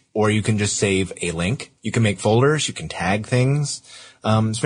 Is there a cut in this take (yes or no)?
yes